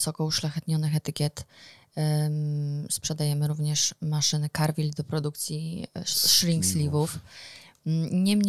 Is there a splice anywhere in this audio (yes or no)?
no